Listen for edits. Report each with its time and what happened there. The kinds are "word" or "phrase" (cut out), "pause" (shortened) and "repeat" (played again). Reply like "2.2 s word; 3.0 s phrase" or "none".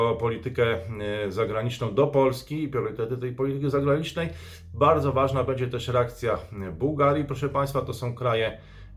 none